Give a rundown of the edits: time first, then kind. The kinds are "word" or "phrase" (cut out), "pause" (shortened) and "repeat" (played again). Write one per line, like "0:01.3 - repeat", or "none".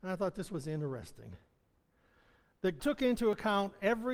0:02.8 - word